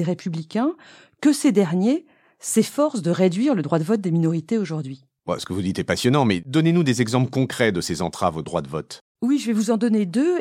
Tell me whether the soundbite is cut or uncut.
uncut